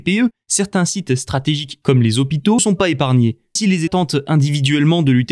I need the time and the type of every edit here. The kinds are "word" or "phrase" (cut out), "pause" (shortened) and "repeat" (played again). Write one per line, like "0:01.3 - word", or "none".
0:01.8 - phrase
0:02.6 - word
0:03.6 - word
0:03.9 - word